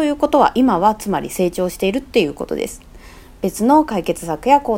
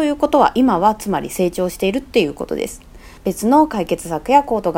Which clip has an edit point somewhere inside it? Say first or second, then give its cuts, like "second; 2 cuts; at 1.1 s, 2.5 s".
second; 1 cut; at 3.2 s